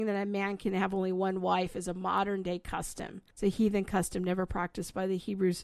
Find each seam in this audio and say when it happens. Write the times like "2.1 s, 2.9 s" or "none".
3.3 s